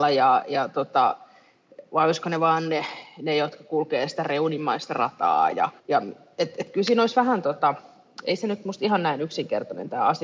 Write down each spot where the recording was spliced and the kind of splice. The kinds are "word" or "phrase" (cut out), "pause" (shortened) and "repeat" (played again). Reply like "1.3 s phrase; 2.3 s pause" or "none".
5.8 s pause